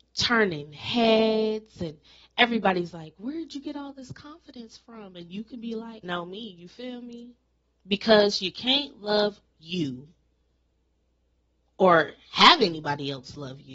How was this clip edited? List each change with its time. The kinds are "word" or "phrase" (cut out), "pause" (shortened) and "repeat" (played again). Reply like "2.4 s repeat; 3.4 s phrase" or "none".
6.0 s phrase